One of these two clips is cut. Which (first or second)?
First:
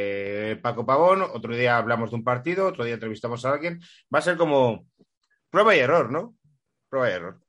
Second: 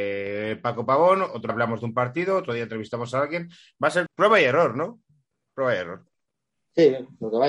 second